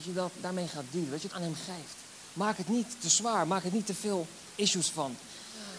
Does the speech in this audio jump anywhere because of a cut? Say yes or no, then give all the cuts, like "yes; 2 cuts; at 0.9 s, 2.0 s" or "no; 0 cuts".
yes; 1 cut; at 1.3 s